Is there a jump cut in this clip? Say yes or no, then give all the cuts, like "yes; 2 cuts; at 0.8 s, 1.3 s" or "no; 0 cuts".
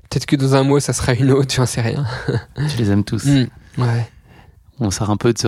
no; 0 cuts